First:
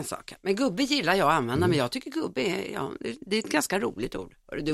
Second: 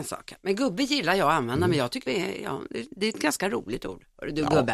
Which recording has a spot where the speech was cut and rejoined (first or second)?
second